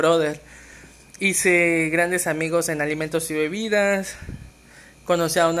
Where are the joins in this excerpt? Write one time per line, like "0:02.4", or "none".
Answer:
none